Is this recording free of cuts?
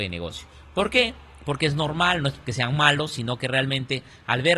yes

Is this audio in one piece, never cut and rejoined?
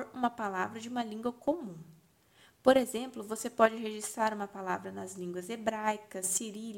yes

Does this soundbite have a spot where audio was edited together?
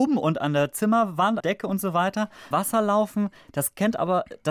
yes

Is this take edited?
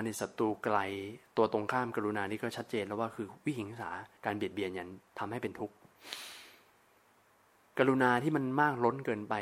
yes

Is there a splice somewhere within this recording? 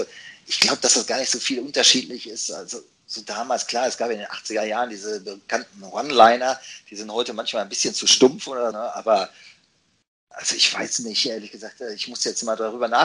yes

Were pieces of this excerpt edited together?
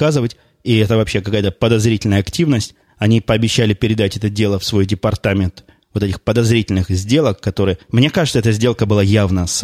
no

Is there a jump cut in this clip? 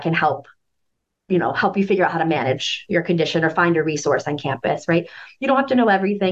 no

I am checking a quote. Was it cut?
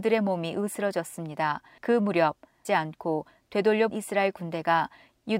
yes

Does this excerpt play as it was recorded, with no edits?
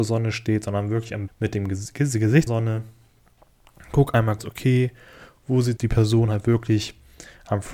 no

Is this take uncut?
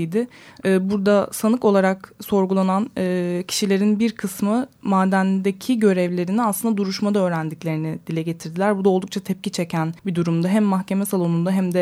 no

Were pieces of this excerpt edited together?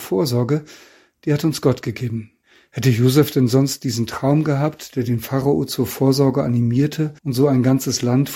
yes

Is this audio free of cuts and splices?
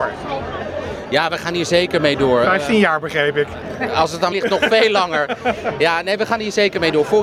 no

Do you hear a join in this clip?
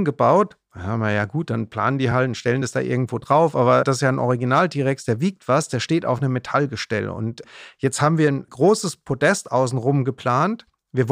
no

